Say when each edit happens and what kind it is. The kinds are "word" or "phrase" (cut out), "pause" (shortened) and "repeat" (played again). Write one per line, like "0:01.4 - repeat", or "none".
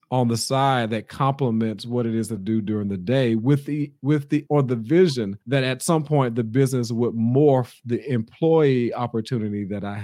0:02.4 - word
0:04.5 - word
0:05.4 - pause